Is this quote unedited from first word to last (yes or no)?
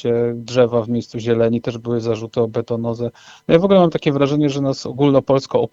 yes